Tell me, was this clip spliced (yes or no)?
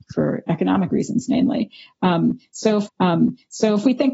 yes